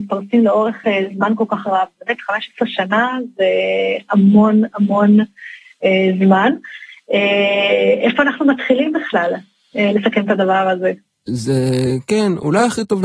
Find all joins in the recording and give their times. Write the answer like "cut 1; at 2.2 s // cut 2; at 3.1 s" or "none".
none